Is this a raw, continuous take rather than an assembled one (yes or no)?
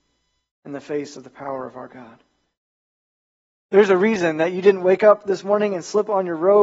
yes